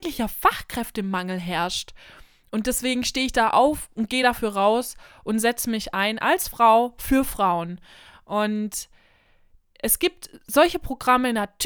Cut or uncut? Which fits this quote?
uncut